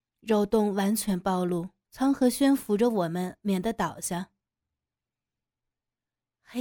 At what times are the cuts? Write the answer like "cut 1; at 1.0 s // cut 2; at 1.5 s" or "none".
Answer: cut 1; at 1.8 s

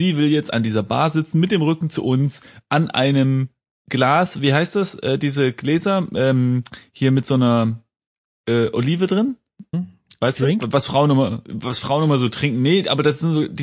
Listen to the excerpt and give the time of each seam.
cut 1; at 9.7 s

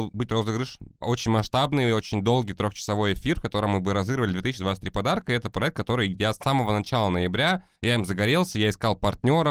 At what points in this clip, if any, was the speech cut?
cut 1; at 7.8 s

